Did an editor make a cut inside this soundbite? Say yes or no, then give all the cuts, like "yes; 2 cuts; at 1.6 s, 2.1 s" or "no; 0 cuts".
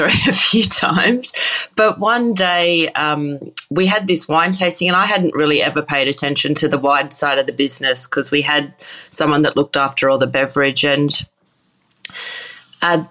no; 0 cuts